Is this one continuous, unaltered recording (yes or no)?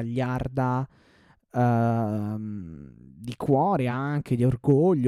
yes